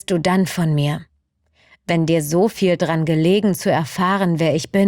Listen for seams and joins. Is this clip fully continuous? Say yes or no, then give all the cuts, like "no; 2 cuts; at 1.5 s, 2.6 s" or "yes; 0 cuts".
yes; 0 cuts